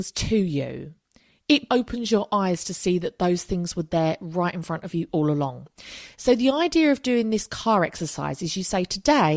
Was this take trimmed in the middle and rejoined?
yes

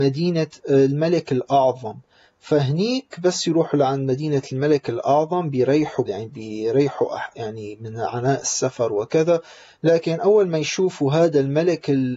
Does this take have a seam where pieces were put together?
yes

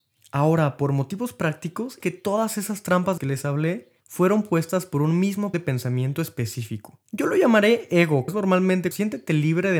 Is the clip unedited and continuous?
no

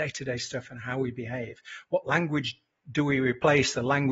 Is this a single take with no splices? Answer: yes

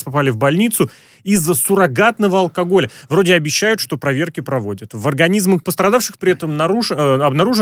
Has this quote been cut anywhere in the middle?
no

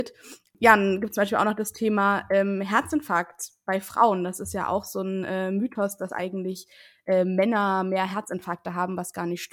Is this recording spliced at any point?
no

